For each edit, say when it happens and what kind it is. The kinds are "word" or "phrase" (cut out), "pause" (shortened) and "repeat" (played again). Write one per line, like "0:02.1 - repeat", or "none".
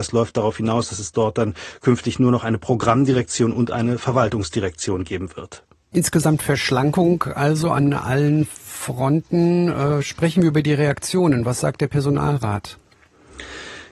none